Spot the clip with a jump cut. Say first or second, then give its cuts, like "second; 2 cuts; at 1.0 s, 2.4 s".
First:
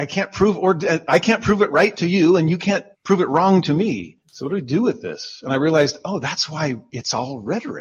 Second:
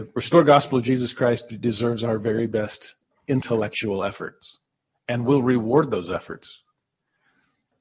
first; 2 cuts; at 2.9 s, 4.2 s